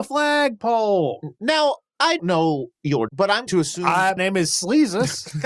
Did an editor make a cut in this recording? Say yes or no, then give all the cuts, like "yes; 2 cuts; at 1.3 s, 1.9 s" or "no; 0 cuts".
yes; 4 cuts; at 2.2 s, 3.1 s, 3.5 s, 4.2 s